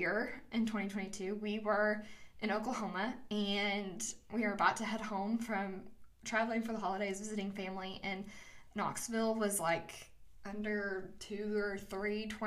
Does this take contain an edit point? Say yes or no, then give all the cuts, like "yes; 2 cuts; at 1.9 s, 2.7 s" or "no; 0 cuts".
no; 0 cuts